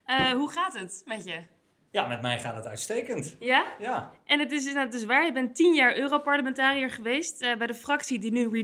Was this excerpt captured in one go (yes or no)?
yes